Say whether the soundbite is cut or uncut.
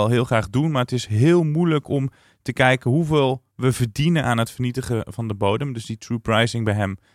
uncut